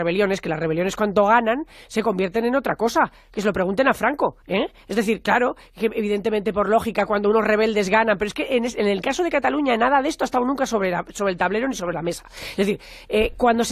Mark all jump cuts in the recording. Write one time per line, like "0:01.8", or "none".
0:04.4